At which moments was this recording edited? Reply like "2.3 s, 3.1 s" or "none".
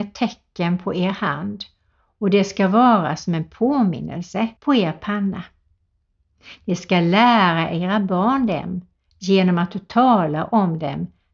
4.6 s

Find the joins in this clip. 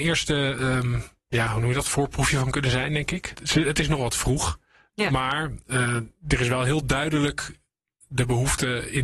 none

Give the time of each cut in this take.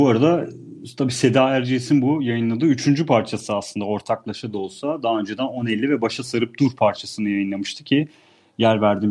none

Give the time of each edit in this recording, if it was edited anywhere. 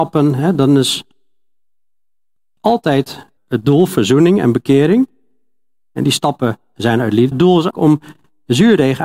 3.4 s, 7.3 s, 7.7 s

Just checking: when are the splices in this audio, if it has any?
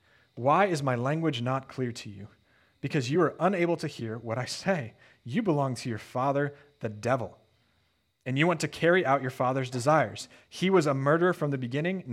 none

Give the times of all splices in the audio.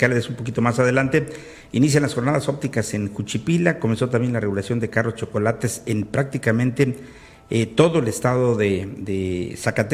none

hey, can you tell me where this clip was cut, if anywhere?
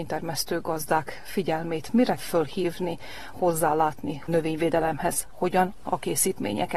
2.2 s, 3.3 s, 4.3 s, 5.8 s

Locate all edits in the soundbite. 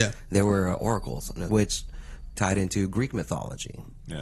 1.5 s, 2.4 s

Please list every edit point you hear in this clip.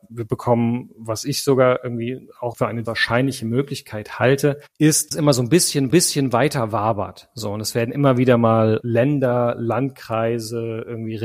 2.8 s, 5.1 s, 5.9 s

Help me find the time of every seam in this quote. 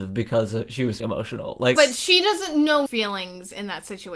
1.0 s, 1.8 s, 2.9 s

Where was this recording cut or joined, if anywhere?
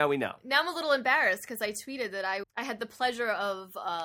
2.4 s

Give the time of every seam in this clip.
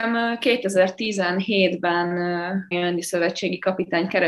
2.7 s

